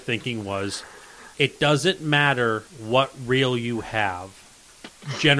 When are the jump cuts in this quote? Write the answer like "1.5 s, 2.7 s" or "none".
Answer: 1.3 s, 2.7 s